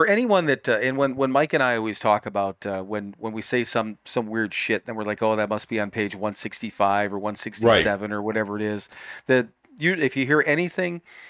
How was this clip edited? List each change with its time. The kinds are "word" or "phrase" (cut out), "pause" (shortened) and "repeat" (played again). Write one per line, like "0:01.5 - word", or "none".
none